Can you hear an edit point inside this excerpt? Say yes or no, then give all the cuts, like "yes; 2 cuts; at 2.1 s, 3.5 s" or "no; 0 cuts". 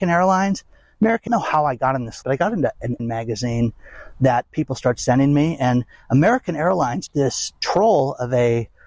yes; 4 cuts; at 1.3 s, 2.2 s, 3.0 s, 7.1 s